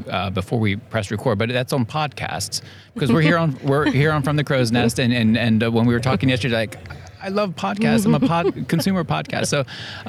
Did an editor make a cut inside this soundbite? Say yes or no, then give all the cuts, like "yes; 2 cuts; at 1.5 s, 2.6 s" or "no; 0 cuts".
no; 0 cuts